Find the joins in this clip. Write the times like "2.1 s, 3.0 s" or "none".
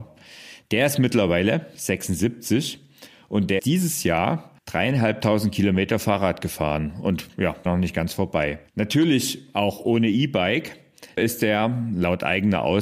3.6 s, 4.6 s, 7.7 s, 8.7 s, 11.2 s

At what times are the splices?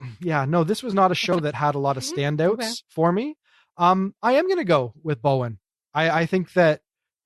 none

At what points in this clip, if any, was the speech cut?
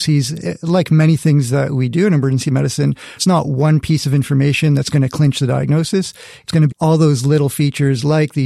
3.2 s, 6.7 s

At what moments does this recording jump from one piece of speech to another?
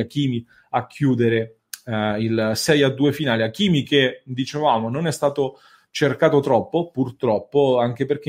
none

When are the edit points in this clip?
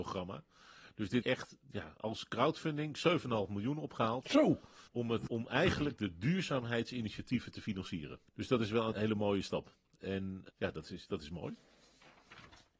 1.2 s, 4.9 s, 5.3 s, 8.3 s, 8.9 s, 10.5 s

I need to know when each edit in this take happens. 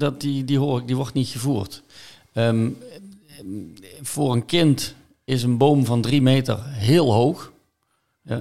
none

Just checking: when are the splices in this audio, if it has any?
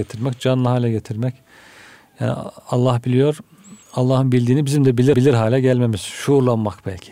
3.8 s, 5.1 s

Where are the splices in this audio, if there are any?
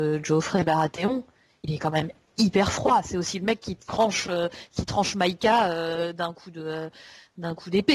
none

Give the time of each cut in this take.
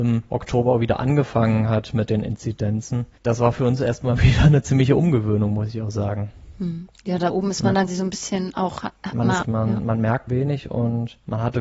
7.9 s, 9.4 s, 10.3 s

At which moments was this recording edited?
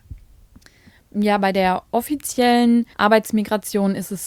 2.9 s

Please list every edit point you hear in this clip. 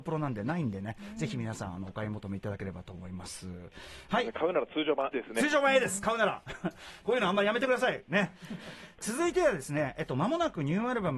5.1 s, 7.0 s, 8.6 s

